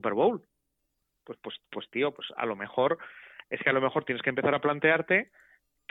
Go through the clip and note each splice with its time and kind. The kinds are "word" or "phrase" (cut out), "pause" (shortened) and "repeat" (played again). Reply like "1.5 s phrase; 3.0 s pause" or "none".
none